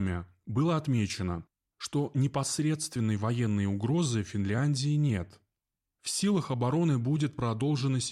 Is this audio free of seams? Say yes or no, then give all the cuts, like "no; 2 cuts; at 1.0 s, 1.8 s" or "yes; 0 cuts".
yes; 0 cuts